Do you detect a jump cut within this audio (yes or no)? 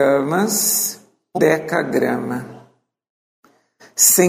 yes